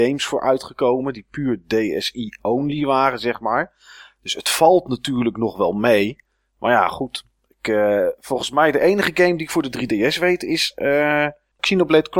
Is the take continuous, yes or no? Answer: yes